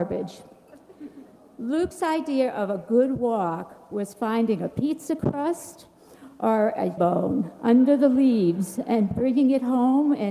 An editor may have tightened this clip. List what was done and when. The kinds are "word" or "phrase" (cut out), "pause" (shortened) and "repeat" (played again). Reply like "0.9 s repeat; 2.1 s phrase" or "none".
7.0 s word